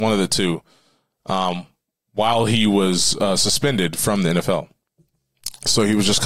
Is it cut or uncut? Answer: uncut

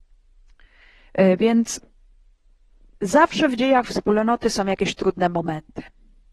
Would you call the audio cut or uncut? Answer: uncut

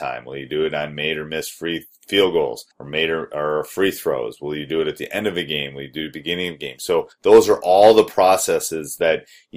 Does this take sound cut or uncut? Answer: cut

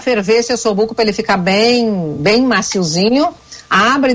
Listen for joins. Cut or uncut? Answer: uncut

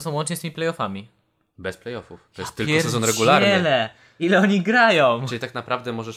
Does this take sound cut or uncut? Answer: uncut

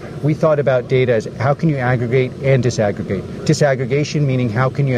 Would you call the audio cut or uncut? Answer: uncut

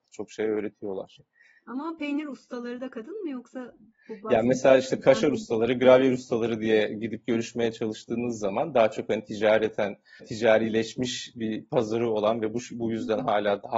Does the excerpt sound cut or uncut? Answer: uncut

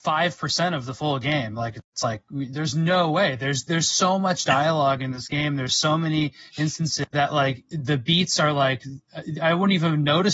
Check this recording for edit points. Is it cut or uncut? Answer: cut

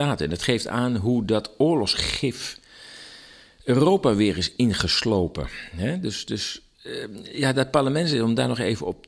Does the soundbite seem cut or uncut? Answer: uncut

